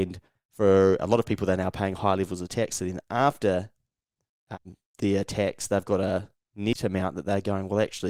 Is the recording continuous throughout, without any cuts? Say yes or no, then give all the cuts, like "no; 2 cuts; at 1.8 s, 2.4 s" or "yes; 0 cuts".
yes; 0 cuts